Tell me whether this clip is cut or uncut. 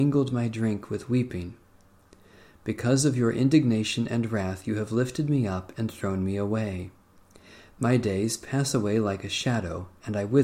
uncut